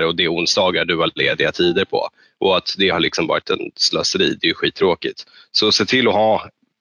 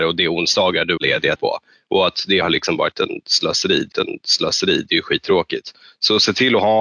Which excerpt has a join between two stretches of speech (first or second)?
second